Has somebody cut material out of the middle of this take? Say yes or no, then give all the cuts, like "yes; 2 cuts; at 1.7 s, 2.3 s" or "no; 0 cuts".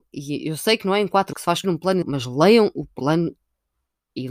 yes; 3 cuts; at 1.3 s, 1.6 s, 2.0 s